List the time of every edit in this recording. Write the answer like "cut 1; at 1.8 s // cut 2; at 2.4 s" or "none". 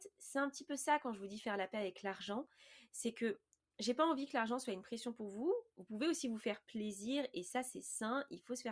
none